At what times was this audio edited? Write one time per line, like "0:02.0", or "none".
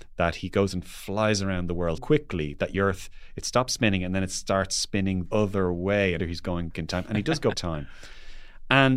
0:02.0
0:02.7
0:05.3
0:06.2
0:06.7
0:07.5

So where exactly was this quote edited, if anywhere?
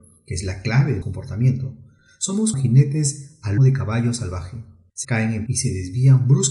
0:01.0
0:02.5
0:03.6
0:05.0
0:05.5

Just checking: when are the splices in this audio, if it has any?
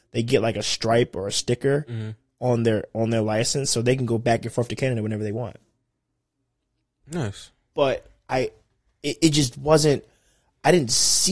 none

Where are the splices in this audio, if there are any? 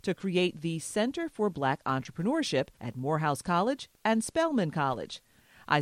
0:02.7

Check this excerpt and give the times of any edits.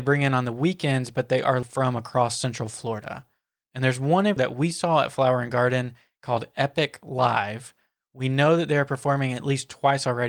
0:01.6
0:04.4

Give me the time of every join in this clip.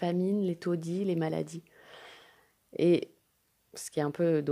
none

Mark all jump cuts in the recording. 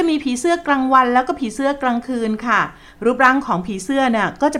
none

